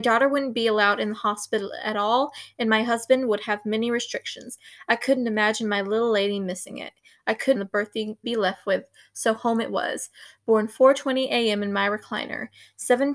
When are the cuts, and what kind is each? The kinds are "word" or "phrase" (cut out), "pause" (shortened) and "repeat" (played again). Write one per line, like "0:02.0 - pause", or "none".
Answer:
0:07.6 - phrase
0:08.2 - phrase